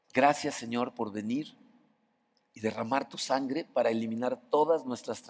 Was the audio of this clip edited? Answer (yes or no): no